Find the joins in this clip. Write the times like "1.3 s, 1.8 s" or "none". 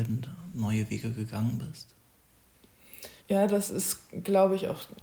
3.2 s